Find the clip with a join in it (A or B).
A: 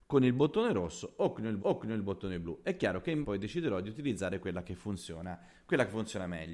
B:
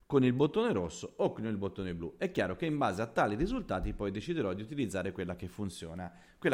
A